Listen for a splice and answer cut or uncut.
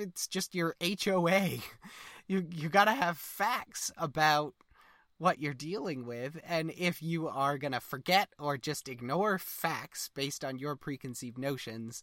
uncut